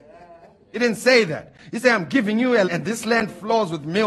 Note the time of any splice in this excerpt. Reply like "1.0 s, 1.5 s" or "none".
2.6 s